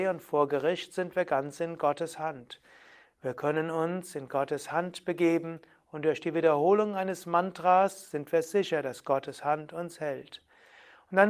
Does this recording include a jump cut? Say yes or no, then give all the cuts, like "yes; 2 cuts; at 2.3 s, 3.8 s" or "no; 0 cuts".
no; 0 cuts